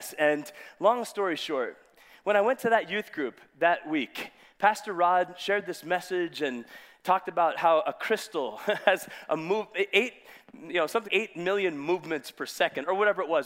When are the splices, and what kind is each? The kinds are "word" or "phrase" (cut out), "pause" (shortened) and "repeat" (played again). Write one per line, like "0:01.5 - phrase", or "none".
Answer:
0:11.1 - word